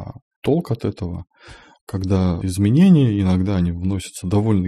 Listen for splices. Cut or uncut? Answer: cut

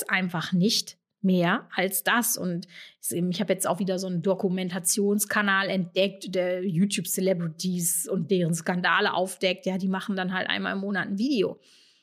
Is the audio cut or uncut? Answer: uncut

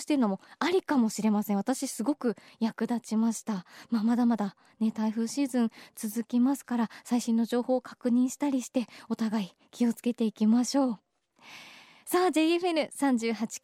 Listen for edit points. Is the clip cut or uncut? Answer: uncut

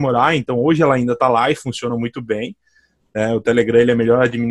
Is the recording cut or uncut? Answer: uncut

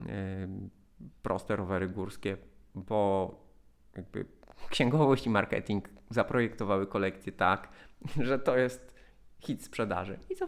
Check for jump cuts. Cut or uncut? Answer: uncut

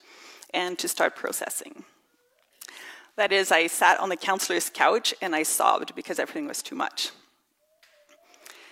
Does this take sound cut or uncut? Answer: uncut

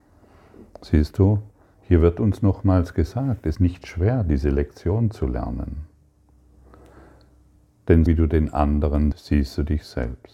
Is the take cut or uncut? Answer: cut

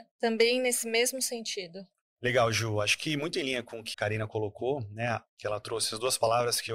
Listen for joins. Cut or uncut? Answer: cut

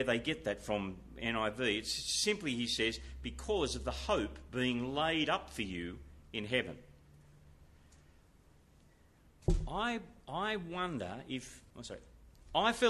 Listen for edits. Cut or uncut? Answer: cut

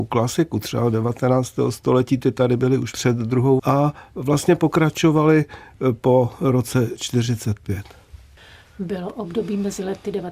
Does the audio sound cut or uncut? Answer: cut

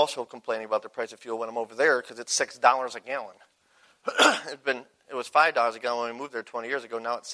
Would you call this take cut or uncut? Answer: uncut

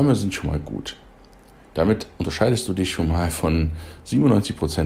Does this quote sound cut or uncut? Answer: uncut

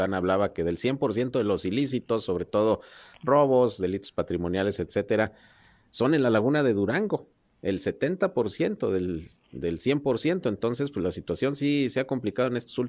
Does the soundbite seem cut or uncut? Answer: uncut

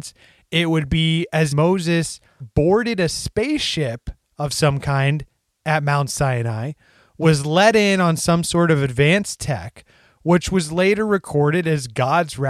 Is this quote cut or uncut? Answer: cut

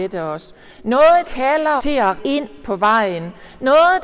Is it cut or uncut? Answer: cut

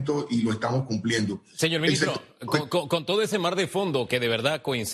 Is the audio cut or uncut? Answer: uncut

